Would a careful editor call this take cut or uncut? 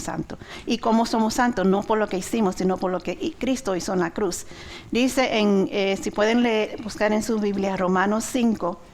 uncut